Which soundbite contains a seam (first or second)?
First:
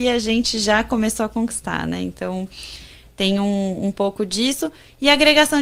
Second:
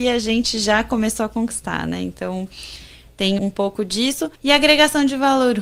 second